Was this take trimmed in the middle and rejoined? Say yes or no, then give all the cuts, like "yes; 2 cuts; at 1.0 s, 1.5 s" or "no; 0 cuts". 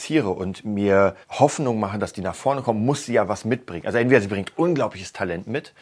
yes; 1 cut; at 1.2 s